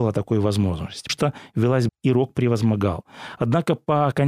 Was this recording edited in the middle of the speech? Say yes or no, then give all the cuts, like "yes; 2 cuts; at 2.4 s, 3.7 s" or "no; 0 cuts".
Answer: yes; 2 cuts; at 1.1 s, 1.9 s